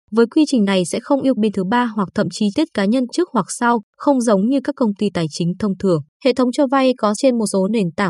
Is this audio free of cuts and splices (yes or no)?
no